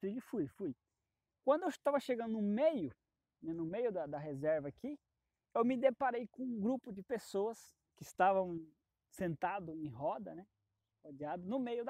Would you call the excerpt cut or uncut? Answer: uncut